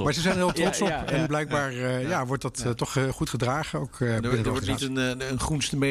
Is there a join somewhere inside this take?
yes; 1 cut; at 1.3 s

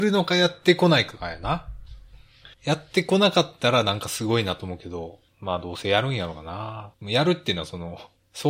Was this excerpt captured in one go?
no; 3 cuts; at 2.5 s, 5.3 s, 7.0 s

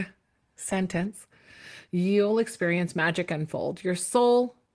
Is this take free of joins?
yes; 0 cuts

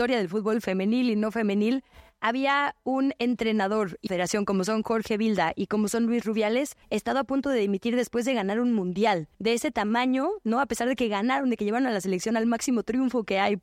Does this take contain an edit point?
yes; 3 cuts; at 4.1 s, 6.8 s, 9.3 s

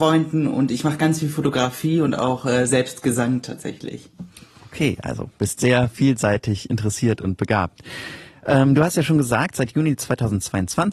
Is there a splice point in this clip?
no; 0 cuts

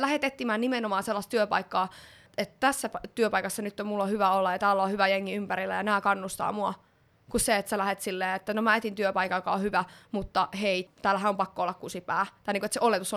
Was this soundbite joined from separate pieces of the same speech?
no; 0 cuts

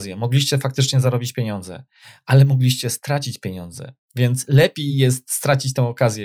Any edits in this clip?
no; 0 cuts

